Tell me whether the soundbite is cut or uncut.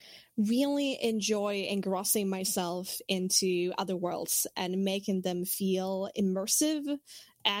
uncut